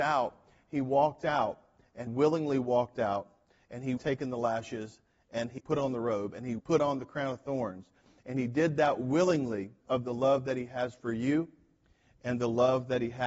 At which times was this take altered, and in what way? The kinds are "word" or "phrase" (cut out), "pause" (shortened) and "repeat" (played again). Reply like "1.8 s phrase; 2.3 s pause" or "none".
2.1 s word; 4.0 s phrase; 5.6 s word; 6.6 s word; 9.8 s word